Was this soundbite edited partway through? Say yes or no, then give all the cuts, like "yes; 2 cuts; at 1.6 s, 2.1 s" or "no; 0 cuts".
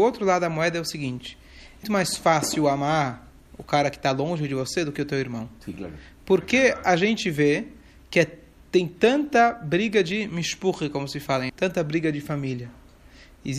yes; 2 cuts; at 1.8 s, 11.5 s